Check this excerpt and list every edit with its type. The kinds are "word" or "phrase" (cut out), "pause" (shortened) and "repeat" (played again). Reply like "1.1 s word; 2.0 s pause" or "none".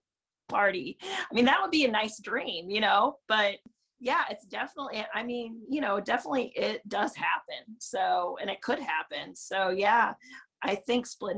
none

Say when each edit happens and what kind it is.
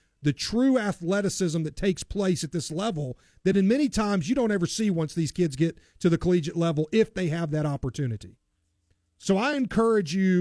none

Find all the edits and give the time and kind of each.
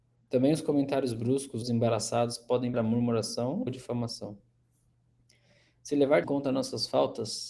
1.6 s word; 2.7 s word; 3.7 s word; 6.2 s word

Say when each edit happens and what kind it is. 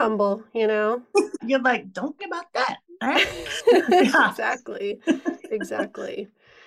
1.4 s word; 2.2 s word

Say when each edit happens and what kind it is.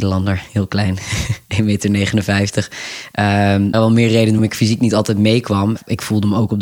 3.7 s phrase; 4.4 s word

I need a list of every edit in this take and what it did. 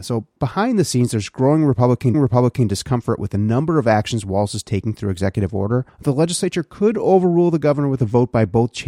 2.1 s repeat; 5.9 s pause

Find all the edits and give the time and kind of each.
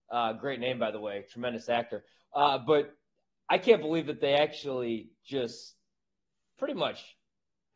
3.4 s word

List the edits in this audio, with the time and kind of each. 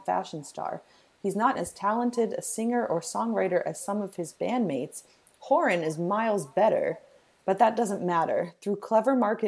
1.6 s word

